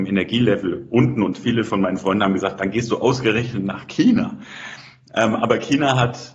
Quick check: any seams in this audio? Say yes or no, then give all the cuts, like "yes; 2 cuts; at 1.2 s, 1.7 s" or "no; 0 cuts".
no; 0 cuts